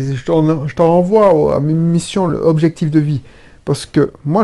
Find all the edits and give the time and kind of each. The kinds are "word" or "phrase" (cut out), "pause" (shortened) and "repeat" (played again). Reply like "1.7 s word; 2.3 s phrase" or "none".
none